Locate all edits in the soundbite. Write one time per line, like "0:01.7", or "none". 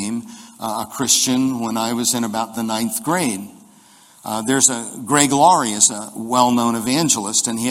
none